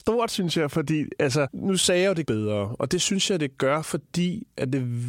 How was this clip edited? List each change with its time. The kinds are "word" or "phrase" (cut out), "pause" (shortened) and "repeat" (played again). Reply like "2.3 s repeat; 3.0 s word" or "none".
2.2 s word